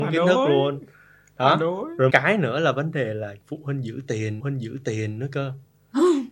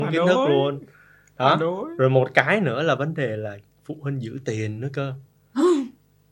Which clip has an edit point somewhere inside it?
first; 3 cuts; at 2.1 s, 3.4 s, 4.4 s

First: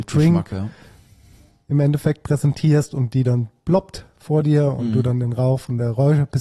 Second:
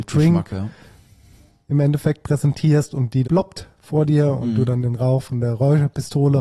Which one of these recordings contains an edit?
second; 1 cut; at 3.2 s

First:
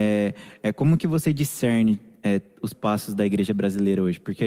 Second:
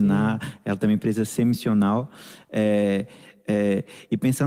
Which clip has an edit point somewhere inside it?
first; 1 cut; at 2.7 s

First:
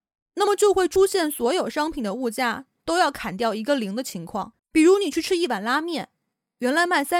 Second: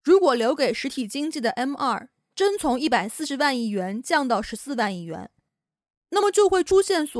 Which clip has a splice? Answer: first; 1 cut; at 4.6 s

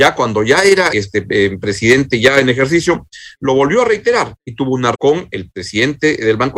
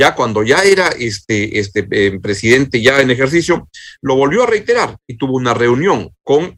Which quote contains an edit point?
first; 2 cuts; at 0.9 s, 4.9 s

